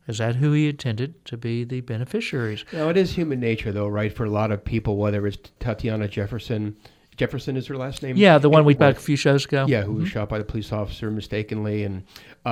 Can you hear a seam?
yes; 2 cuts; at 5.6 s, 8.8 s

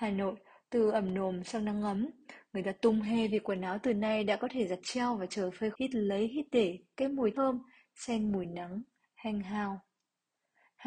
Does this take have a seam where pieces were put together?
yes; 2 cuts; at 5.7 s, 7.3 s

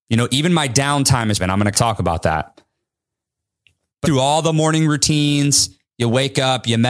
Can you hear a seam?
yes; 3 cuts; at 1.4 s, 1.7 s, 4.0 s

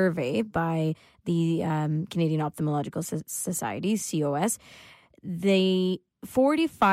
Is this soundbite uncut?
yes; 0 cuts

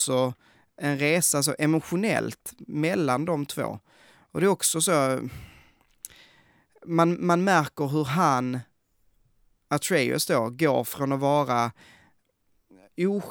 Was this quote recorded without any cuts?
yes; 0 cuts

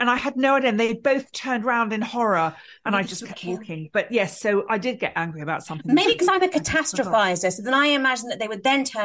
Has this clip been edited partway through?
no; 0 cuts

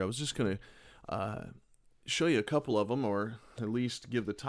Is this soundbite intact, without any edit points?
yes; 0 cuts

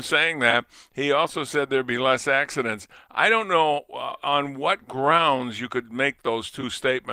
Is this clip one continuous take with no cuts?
yes; 0 cuts

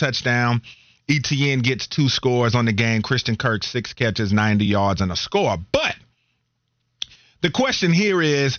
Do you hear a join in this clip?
no; 0 cuts

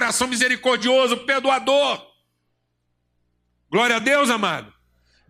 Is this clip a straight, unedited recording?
yes; 0 cuts

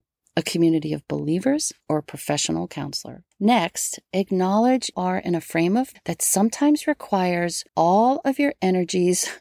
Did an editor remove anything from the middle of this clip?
yes; 5 cuts; at 1.8 s, 3.3 s, 4.9 s, 5.9 s, 7.7 s

